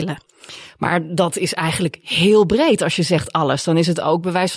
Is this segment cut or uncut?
uncut